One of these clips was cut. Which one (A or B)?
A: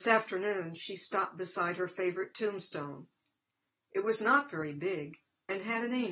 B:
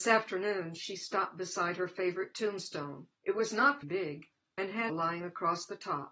B